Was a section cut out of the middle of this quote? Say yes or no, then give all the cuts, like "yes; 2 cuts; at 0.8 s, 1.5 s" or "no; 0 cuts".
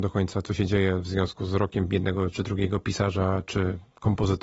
no; 0 cuts